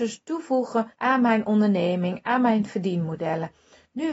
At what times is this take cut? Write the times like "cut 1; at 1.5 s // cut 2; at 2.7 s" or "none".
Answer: cut 1; at 0.9 s